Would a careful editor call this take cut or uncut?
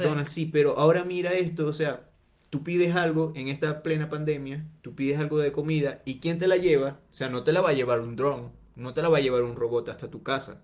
uncut